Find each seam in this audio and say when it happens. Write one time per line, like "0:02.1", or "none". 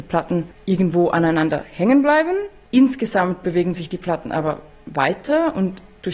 none